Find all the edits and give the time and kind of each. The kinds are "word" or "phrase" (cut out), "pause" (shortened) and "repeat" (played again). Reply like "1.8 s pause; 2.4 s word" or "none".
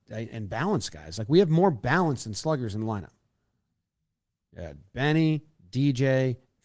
none

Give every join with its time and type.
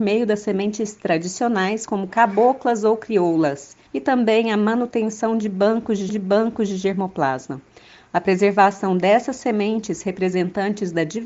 1.9 s word; 3.9 s pause; 6.1 s repeat

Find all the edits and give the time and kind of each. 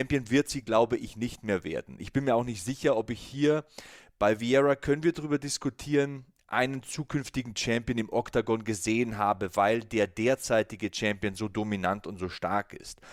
none

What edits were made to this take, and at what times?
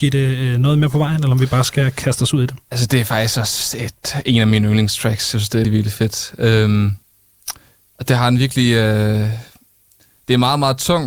5.6 s word

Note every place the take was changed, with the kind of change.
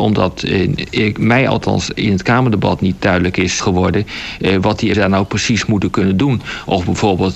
3.0 s word; 3.6 s word; 4.9 s word

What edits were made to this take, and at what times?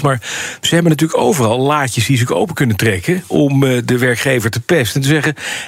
none

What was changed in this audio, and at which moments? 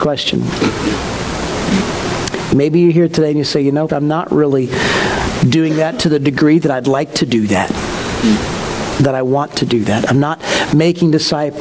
3.9 s word

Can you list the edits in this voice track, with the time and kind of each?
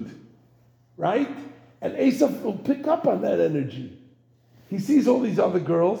none

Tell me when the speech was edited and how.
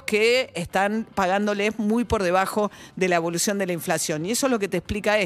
none

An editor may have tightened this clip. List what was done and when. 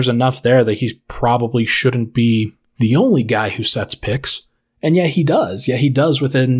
4.6 s pause

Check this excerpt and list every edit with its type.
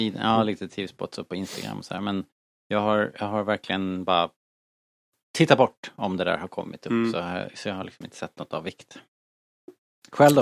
none

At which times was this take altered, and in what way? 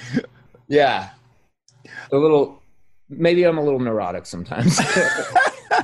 none

